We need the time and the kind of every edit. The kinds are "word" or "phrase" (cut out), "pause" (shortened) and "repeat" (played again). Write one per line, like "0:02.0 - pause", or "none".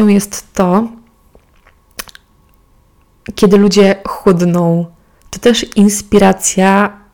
none